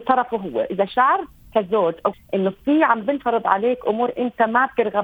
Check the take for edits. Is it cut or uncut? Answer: cut